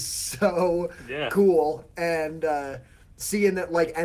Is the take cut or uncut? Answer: uncut